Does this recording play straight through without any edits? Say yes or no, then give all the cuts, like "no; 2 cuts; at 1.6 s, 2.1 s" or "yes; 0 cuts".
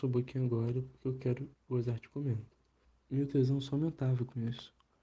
no; 2 cuts; at 1.5 s, 2.8 s